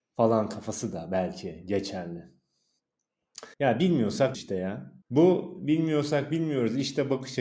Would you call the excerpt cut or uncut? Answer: cut